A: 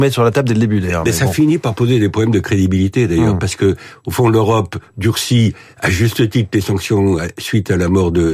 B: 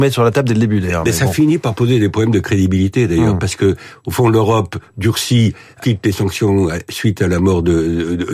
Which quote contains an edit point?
B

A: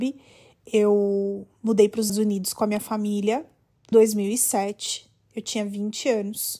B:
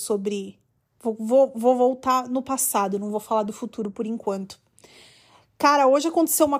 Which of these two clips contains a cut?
A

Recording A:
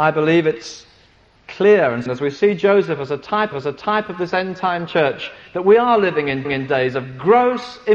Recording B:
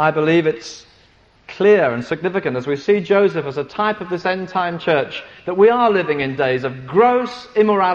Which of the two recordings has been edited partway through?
A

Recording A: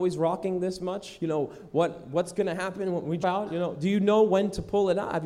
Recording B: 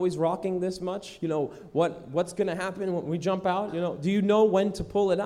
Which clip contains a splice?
A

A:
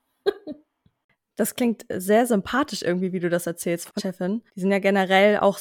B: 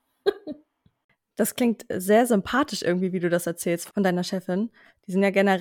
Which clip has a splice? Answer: A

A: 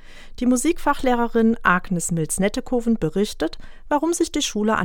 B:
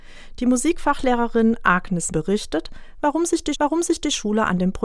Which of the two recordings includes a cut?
B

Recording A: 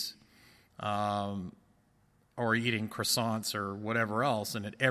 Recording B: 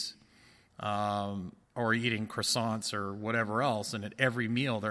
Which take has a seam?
B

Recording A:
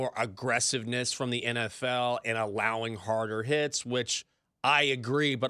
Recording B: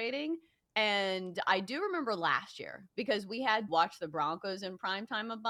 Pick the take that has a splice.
B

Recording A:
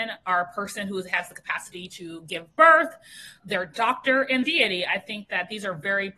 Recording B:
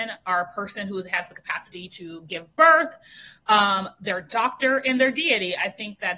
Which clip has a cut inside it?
A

